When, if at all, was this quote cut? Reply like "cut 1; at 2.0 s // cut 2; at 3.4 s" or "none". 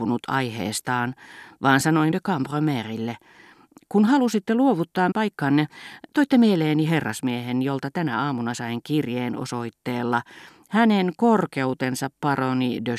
cut 1; at 2.1 s // cut 2; at 5.1 s